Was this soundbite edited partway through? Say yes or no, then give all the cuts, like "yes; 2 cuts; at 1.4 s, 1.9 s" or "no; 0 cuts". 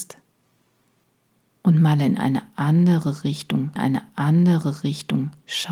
yes; 1 cut; at 3.8 s